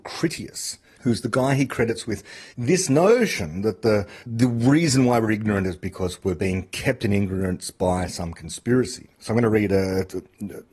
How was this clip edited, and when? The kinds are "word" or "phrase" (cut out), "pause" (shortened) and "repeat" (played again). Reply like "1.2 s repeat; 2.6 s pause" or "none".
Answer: 2.5 s pause; 4.2 s pause